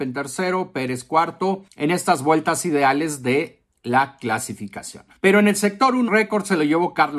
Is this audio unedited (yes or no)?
no